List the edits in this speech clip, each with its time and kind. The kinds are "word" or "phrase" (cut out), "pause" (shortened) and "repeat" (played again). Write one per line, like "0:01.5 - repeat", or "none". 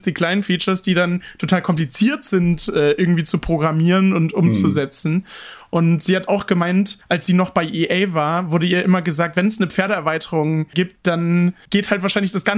none